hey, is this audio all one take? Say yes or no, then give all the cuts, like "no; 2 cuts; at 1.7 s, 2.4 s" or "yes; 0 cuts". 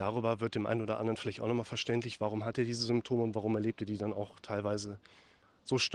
yes; 0 cuts